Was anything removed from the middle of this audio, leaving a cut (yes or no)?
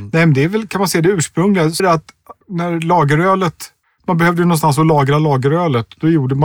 yes